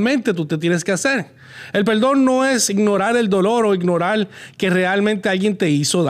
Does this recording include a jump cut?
no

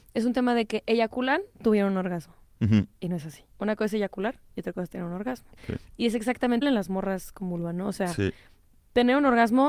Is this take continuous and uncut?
no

